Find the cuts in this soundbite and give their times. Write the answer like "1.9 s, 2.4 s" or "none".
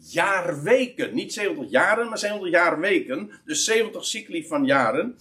none